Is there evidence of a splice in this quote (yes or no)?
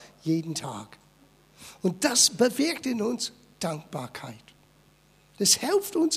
no